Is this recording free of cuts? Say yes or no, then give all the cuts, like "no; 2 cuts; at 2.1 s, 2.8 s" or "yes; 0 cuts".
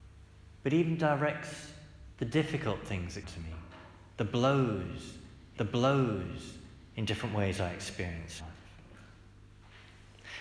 no; 3 cuts; at 3.2 s, 5.6 s, 8.4 s